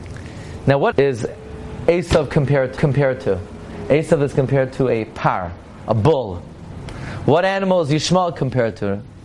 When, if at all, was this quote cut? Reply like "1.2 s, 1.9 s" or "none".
0.9 s, 2.8 s